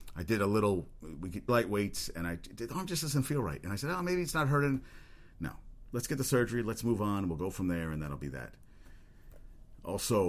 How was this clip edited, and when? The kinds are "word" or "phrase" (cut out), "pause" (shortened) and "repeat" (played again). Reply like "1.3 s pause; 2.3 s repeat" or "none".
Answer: 1.5 s word